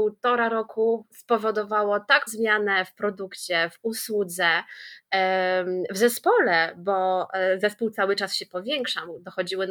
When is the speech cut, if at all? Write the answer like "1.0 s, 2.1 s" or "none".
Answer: 2.3 s

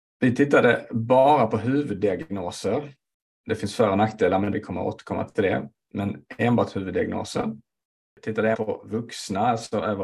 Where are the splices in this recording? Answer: 4.5 s, 8.5 s

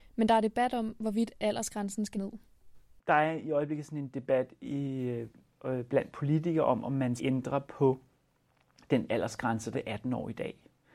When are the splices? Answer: 2.1 s, 7.2 s, 9.7 s

